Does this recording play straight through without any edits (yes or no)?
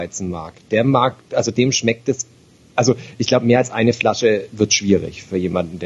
yes